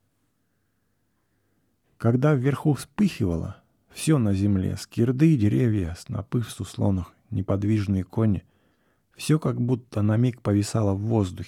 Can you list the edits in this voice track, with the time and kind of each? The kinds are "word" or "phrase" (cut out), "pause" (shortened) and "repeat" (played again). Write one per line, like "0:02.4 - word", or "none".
none

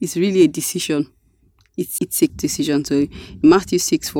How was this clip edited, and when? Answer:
0:02.0 - word
0:02.3 - word

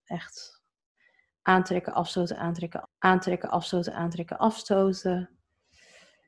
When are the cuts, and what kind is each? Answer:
0:02.8 - repeat

